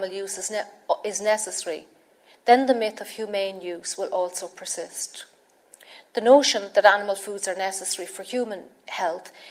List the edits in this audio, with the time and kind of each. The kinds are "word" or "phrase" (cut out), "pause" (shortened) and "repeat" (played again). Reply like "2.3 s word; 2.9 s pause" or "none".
none